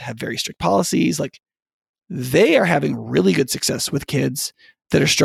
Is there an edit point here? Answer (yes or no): no